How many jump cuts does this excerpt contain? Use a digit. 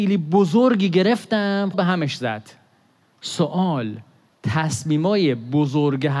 2